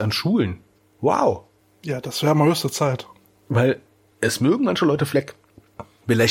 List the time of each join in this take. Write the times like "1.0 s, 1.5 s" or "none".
none